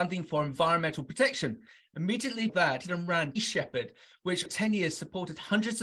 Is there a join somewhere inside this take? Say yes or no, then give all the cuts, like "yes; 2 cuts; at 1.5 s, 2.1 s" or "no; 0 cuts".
yes; 4 cuts; at 2.5 s, 2.8 s, 3.4 s, 4.5 s